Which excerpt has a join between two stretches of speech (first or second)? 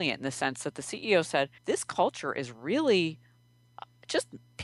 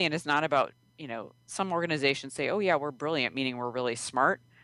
first